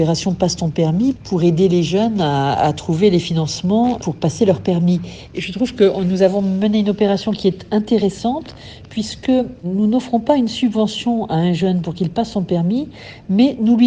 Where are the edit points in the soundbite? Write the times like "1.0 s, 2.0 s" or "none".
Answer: none